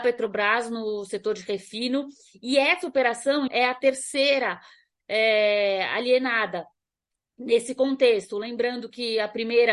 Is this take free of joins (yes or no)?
no